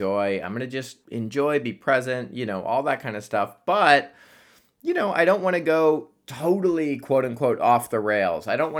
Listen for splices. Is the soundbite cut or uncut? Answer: cut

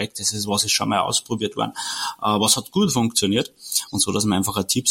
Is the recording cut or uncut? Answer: uncut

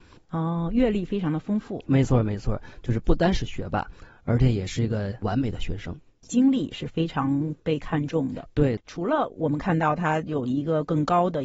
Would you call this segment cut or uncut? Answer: uncut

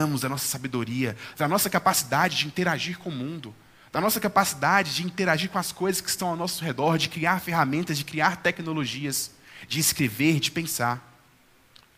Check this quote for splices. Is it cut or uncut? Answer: uncut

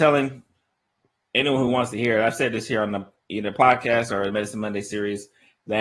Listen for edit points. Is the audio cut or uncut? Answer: uncut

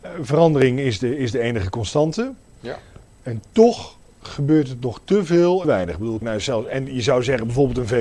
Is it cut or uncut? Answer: cut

